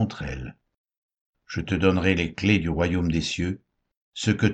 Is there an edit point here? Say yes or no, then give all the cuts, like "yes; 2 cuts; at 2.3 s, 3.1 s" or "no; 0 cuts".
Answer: no; 0 cuts